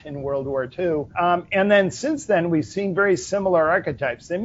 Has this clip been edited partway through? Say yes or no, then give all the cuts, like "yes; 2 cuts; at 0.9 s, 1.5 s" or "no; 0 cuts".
yes; 1 cut; at 1.1 s